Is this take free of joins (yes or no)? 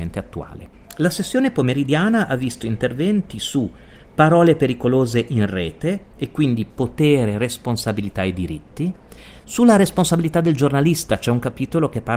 yes